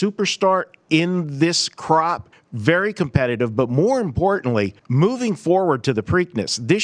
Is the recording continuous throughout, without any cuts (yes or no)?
no